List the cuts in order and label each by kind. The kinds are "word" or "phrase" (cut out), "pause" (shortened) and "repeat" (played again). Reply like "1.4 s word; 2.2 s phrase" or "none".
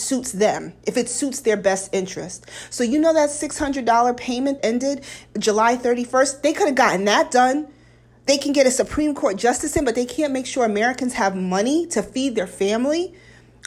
4.6 s word